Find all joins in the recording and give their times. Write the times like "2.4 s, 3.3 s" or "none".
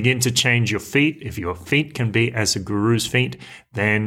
none

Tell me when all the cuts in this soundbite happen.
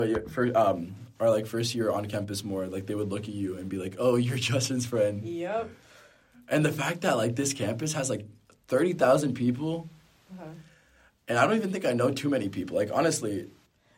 none

